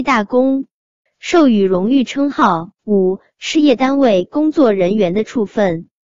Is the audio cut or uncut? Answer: cut